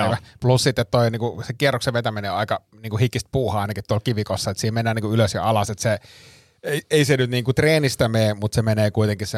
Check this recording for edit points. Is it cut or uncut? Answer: uncut